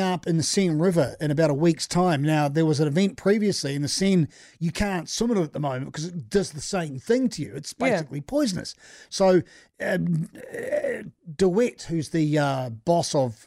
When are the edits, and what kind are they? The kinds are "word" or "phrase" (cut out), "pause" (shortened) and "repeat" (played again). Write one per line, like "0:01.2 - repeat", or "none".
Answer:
none